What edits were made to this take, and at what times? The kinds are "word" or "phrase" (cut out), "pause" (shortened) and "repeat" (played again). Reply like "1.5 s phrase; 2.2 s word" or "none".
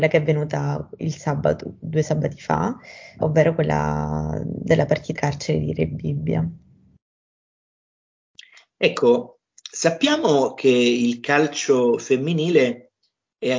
3.2 s word; 5.2 s phrase

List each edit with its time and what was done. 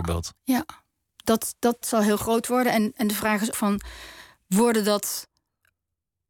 1.8 s word; 3.5 s word

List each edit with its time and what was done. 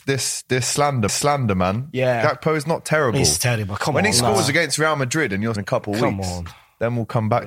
1.1 s repeat; 5.6 s phrase

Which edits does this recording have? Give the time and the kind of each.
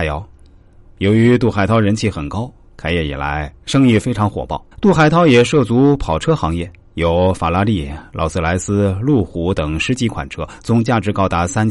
4.7 s pause

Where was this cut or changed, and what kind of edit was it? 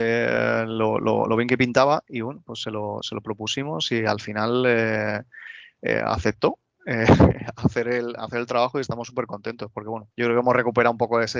10.1 s pause

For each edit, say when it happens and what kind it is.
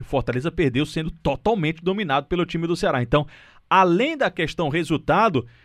none

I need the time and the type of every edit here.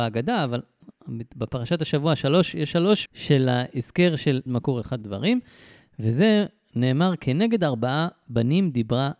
3.1 s word; 4.5 s phrase; 5.0 s word

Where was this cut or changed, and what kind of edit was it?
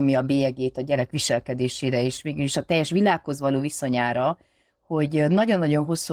none

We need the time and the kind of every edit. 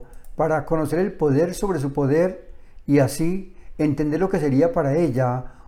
none

